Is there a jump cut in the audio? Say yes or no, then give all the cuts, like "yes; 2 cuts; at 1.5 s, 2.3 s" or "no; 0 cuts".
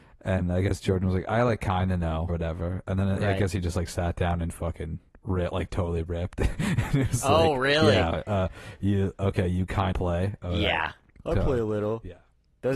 yes; 3 cuts; at 2.3 s, 5.7 s, 9.9 s